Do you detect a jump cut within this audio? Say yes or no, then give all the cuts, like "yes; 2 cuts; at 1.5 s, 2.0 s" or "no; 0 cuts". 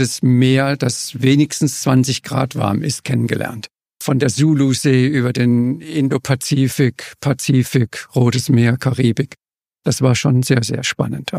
no; 0 cuts